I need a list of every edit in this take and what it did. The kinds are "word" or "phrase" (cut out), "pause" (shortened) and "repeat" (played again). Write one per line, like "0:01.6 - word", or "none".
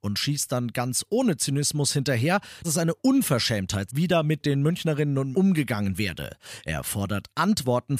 0:02.6 - word
0:03.9 - word
0:05.3 - word